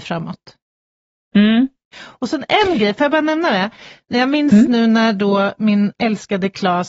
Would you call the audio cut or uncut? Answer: uncut